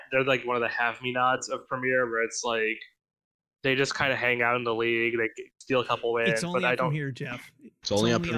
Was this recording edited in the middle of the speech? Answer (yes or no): no